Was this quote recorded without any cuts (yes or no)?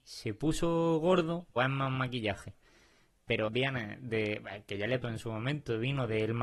no